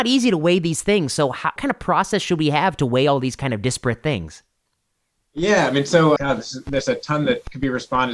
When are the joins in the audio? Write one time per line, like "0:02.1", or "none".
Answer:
0:01.6
0:06.2